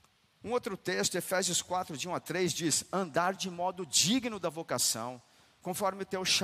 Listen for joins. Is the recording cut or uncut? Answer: uncut